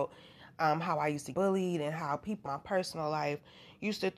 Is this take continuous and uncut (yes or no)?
no